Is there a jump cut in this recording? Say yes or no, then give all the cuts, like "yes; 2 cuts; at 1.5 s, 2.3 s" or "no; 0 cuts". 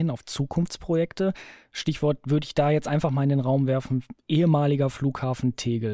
no; 0 cuts